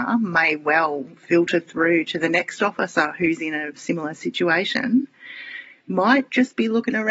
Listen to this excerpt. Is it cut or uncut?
uncut